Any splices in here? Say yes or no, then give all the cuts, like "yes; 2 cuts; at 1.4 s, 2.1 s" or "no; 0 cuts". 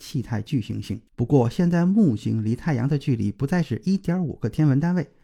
yes; 1 cut; at 1.1 s